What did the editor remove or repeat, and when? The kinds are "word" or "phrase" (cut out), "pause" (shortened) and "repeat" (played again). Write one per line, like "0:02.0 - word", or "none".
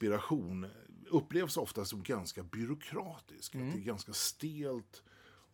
none